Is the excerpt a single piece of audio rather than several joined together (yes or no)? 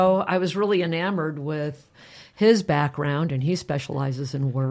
yes